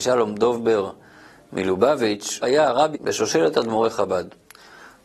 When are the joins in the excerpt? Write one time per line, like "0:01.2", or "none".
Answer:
0:02.4
0:02.9